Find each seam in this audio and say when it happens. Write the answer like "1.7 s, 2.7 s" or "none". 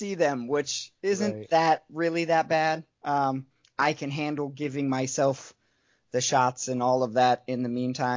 none